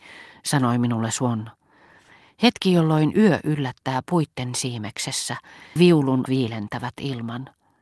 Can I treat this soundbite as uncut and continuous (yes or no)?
no